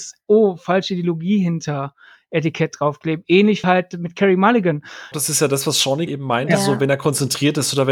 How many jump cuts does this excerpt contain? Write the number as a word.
three